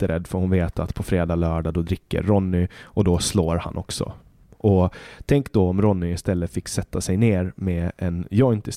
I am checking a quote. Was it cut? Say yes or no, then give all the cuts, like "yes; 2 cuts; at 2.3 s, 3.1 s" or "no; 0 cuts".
no; 0 cuts